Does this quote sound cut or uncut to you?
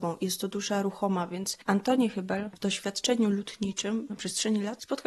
cut